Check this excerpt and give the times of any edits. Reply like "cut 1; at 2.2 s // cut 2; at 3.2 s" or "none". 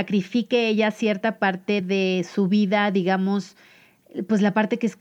none

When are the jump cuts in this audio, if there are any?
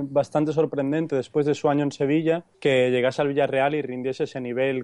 cut 1; at 2.5 s

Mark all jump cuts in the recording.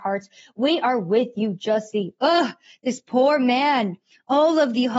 none

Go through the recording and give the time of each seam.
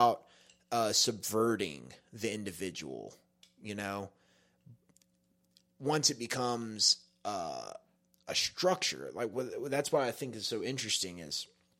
none

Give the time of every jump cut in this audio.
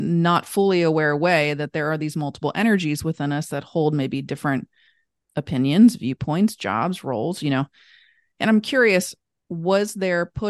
none

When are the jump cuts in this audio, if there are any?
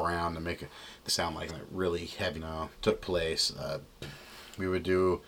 cut 1; at 1.1 s // cut 2; at 1.5 s // cut 3; at 2.4 s // cut 4; at 2.7 s

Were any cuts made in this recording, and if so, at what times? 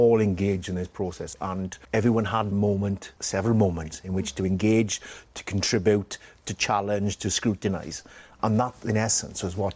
cut 1; at 1.8 s // cut 2; at 2.5 s // cut 3; at 3.2 s

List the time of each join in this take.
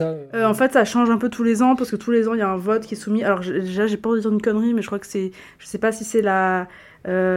none

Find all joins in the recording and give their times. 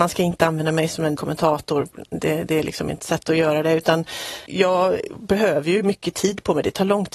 cut 1; at 1.2 s // cut 2; at 3.0 s // cut 3; at 4.5 s

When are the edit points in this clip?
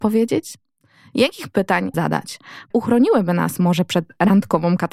cut 1; at 1.9 s // cut 2; at 2.7 s

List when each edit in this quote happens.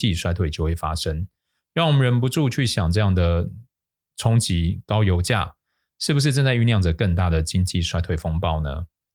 none

